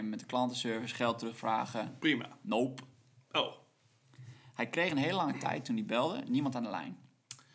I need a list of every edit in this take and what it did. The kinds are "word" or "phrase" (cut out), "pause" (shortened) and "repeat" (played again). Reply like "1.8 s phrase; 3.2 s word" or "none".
none